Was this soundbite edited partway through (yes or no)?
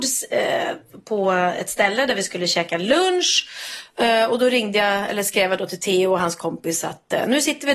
no